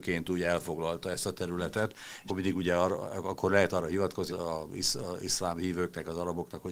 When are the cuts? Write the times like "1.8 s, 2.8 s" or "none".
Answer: 2.3 s, 4.3 s